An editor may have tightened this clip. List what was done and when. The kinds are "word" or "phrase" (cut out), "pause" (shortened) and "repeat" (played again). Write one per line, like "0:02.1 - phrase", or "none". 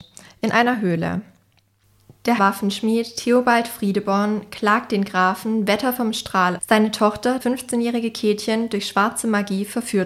0:02.4 - word
0:06.6 - word
0:07.4 - word